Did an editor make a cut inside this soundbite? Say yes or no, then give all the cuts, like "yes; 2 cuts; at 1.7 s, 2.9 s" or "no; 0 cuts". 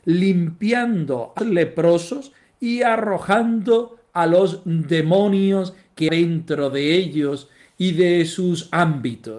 yes; 2 cuts; at 1.4 s, 6.1 s